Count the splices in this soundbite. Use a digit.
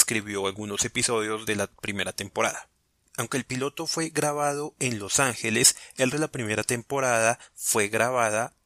2